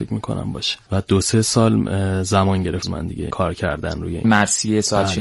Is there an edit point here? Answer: yes; 3 cuts; at 2.8 s, 3.3 s, 4.2 s

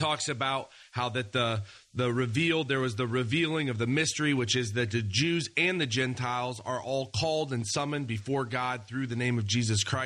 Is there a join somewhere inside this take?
no; 0 cuts

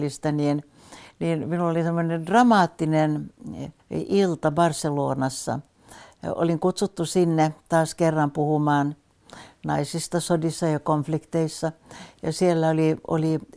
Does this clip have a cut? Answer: yes; 1 cut; at 3.8 s

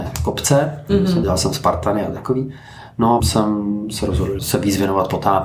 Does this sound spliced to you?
yes; 3 cuts; at 1.2 s, 3.2 s, 4.4 s

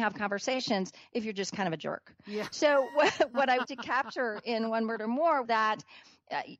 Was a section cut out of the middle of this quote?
yes; 2 cuts; at 3.6 s, 5.4 s

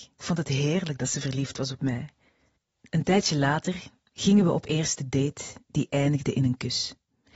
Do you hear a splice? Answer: no; 0 cuts

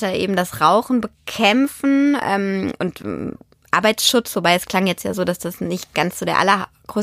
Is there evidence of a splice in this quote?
no; 0 cuts

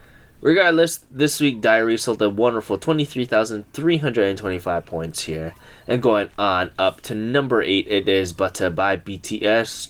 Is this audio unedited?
yes; 0 cuts

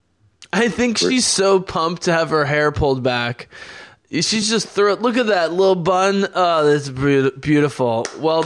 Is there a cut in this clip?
no; 0 cuts

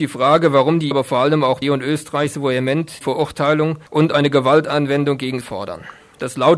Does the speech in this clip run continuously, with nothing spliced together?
no; 5 cuts; at 0.9 s, 1.6 s, 3.0 s, 3.9 s, 5.4 s

